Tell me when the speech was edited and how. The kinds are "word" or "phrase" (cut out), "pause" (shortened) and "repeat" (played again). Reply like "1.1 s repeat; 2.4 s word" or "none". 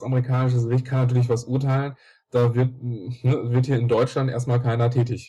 none